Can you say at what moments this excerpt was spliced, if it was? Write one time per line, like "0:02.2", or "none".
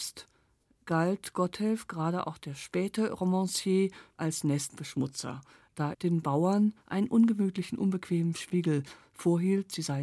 0:05.9